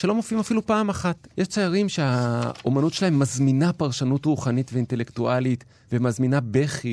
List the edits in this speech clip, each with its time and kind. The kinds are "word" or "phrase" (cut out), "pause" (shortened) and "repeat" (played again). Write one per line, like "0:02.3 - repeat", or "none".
0:01.3 - pause